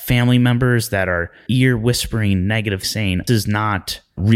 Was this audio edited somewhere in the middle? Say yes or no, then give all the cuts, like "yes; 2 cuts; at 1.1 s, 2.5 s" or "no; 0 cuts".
yes; 3 cuts; at 1.5 s, 2.8 s, 3.3 s